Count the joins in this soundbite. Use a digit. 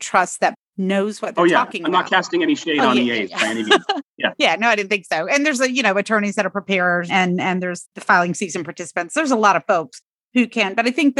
1